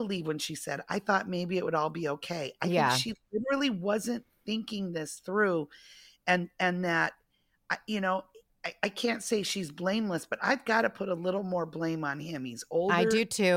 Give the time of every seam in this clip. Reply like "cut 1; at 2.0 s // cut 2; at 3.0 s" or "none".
none